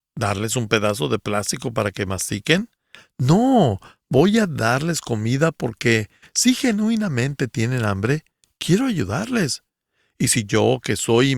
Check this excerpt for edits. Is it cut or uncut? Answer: uncut